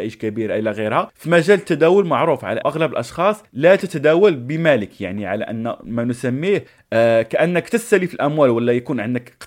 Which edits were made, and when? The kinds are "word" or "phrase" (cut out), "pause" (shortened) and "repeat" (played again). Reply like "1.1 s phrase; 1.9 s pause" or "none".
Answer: 2.6 s word; 3.5 s pause